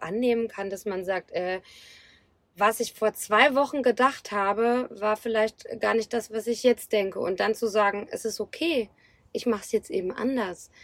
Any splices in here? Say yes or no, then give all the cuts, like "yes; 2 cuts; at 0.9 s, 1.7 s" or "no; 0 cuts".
no; 0 cuts